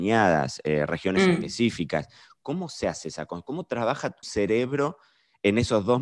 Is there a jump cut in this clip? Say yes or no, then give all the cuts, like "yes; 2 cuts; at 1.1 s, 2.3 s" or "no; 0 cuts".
yes; 1 cut; at 4.2 s